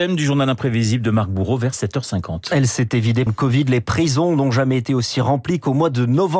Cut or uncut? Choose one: cut